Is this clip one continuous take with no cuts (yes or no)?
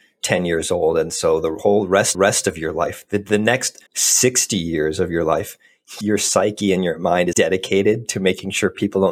no